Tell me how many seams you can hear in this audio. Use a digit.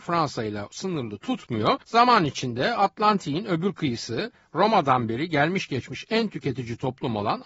1